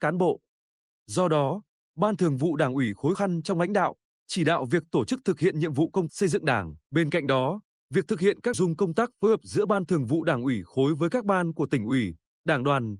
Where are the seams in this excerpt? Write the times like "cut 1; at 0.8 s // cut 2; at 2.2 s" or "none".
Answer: cut 1; at 3.1 s // cut 2; at 6.1 s // cut 3; at 6.8 s // cut 4; at 8.5 s